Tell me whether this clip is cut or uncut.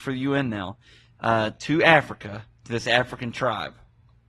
uncut